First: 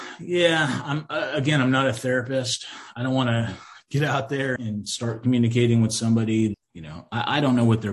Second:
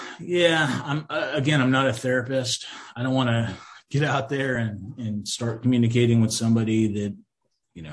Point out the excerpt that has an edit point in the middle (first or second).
first